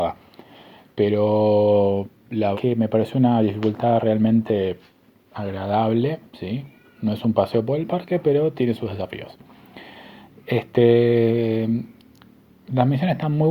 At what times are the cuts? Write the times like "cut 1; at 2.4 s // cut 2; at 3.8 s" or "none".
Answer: cut 1; at 2.5 s